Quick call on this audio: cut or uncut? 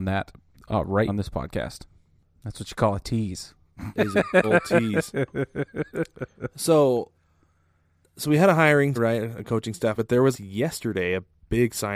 cut